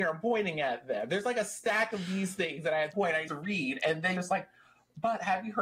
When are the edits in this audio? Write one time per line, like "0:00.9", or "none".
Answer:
0:02.9
0:03.3
0:04.2

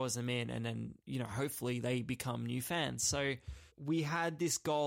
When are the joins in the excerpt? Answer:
0:01.0
0:03.7

